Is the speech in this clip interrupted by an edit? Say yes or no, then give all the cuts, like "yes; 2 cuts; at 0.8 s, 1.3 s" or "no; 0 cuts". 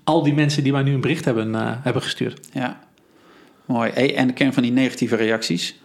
no; 0 cuts